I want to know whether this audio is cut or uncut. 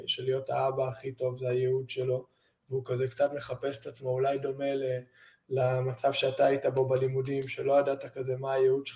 uncut